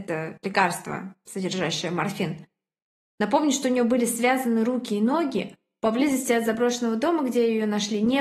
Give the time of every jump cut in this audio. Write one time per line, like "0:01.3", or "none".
none